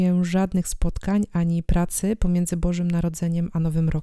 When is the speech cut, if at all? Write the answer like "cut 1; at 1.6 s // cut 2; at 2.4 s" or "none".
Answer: none